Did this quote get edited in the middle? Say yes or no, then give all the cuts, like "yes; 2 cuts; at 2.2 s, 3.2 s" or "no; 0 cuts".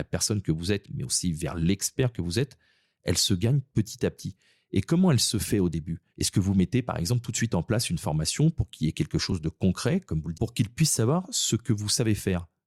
yes; 2 cuts; at 6.1 s, 10.3 s